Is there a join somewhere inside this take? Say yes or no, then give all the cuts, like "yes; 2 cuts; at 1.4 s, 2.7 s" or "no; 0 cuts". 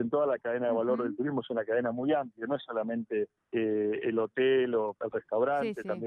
yes; 1 cut; at 3.4 s